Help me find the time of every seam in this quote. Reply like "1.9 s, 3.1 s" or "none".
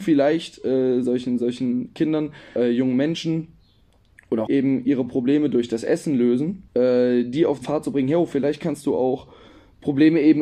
1.0 s, 2.6 s, 4.5 s, 6.7 s, 7.6 s